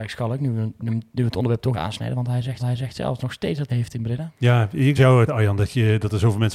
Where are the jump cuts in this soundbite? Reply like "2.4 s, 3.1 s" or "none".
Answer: 1.7 s, 2.6 s, 3.7 s, 4.3 s, 5.0 s, 5.3 s